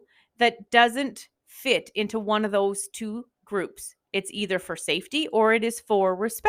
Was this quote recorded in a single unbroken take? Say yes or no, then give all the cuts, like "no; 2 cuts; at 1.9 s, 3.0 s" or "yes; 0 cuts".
no; 1 cut; at 3.3 s